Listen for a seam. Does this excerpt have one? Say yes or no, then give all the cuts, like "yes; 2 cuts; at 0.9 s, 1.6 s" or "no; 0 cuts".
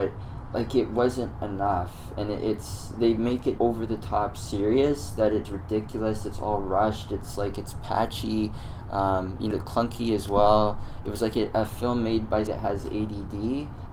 yes; 4 cuts; at 3.6 s, 5.4 s, 9.5 s, 12.5 s